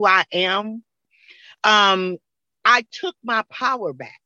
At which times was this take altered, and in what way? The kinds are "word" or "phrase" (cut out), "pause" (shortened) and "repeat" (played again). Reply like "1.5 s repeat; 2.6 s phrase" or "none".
none